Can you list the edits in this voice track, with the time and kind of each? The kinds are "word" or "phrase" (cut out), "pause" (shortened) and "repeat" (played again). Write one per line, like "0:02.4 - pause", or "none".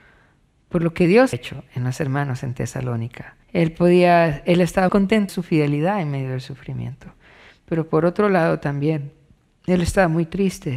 0:01.3 - word
0:03.4 - pause
0:04.9 - word
0:05.3 - phrase